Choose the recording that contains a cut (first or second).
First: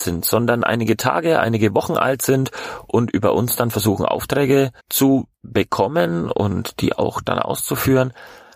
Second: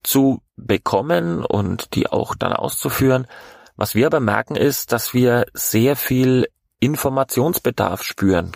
first